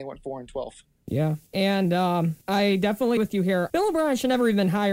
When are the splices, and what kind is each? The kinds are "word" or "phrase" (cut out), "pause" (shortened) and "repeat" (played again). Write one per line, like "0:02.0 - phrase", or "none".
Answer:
0:01.5 - pause
0:02.4 - pause
0:03.2 - word
0:03.7 - word